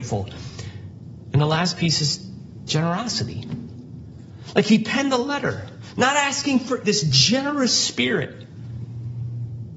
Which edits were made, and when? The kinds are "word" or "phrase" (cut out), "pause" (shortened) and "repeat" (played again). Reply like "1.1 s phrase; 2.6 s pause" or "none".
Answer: 6.8 s word